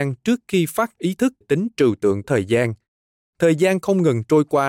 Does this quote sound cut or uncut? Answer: cut